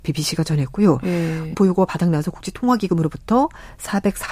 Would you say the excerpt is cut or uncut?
cut